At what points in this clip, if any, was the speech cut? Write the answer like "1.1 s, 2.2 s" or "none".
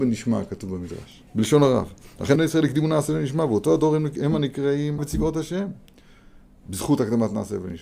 1.3 s, 2.4 s, 5.0 s